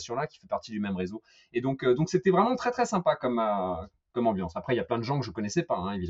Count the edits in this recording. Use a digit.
0